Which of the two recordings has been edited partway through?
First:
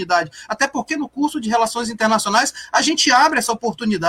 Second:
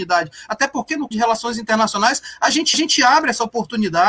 second; 2 cuts; at 1.1 s, 2.7 s

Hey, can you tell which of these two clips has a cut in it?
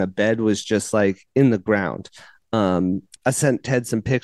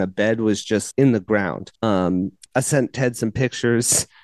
second; 2 cuts; at 0.9 s, 1.7 s

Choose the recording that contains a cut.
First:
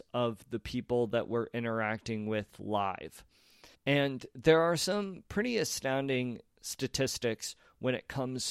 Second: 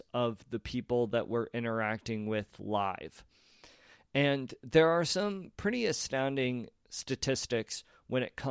first; 1 cut; at 3.7 s

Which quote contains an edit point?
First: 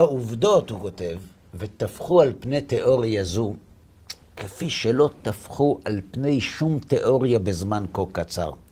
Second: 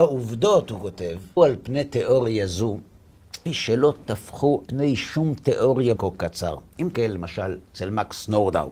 second; 5 cuts; at 1.4 s, 3.5 s, 4.7 s, 6.0 s, 6.9 s

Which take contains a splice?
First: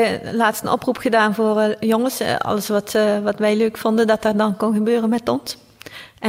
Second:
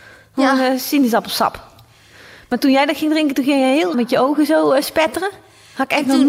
second; 1 cut; at 3.9 s

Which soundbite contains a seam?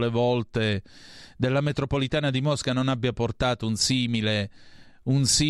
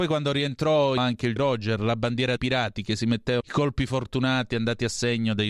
second; 4 cuts; at 1.0 s, 1.4 s, 2.4 s, 3.4 s

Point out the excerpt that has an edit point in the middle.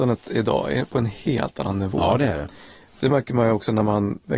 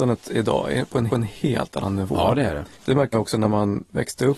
second; 3 cuts; at 1.1 s, 2.7 s, 3.1 s

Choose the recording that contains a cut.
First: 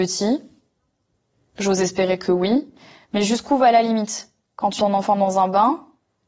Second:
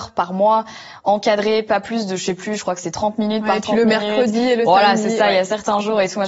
first; 1 cut; at 4.8 s

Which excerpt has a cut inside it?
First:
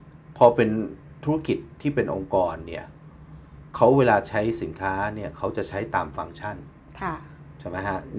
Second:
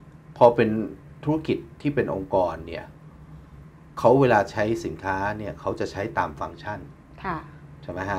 first; 1 cut; at 3.7 s

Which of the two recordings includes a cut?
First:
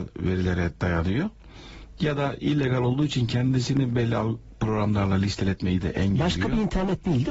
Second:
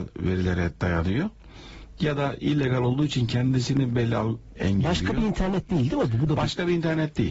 second; 1 cut; at 4.6 s

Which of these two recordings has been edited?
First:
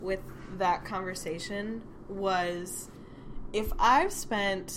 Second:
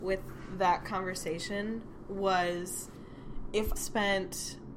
second; 1 cut; at 3.8 s

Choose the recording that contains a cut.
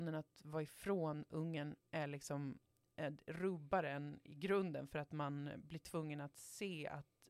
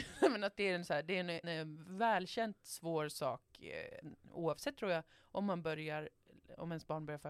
second; 1 cut; at 1.4 s

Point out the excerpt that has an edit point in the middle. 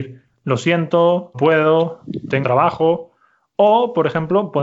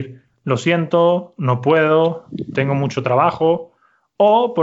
first; 2 cuts; at 1.3 s, 2.4 s

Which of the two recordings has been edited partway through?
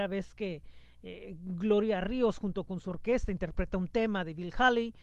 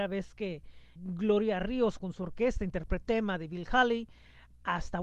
second; 3 cuts; at 1.0 s, 2.0 s, 3.0 s

